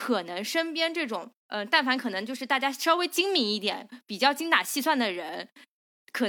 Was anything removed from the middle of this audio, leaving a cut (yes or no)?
yes